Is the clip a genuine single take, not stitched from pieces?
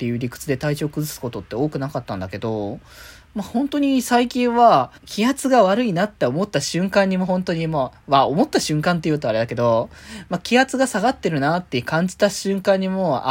no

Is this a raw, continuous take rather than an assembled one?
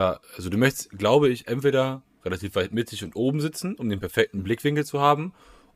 yes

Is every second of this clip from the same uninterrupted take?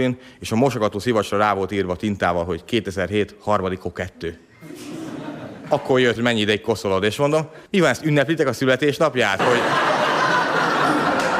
no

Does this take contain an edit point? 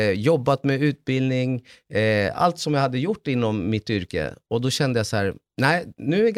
no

